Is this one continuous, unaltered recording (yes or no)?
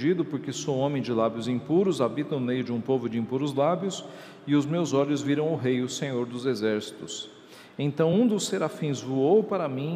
yes